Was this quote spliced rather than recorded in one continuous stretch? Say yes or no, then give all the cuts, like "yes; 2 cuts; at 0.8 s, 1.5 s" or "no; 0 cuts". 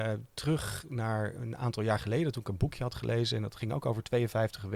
no; 0 cuts